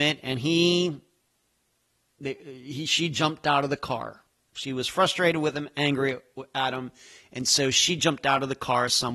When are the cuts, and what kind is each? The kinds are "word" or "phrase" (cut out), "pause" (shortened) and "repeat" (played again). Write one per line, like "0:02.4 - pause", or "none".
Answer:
none